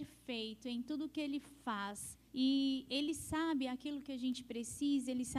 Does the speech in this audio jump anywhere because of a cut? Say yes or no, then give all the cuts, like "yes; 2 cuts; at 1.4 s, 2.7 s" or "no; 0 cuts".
yes; 1 cut; at 2.3 s